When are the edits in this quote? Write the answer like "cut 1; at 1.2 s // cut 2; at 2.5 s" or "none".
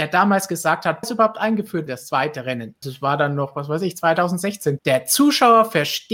cut 1; at 1.0 s // cut 2; at 1.9 s // cut 3; at 2.8 s // cut 4; at 4.8 s